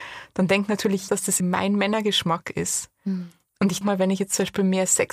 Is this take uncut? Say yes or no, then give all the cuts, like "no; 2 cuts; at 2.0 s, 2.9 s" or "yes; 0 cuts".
no; 3 cuts; at 1.1 s, 1.4 s, 3.8 s